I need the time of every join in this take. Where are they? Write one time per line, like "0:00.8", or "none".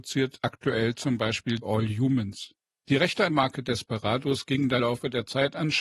0:01.6
0:03.3
0:04.8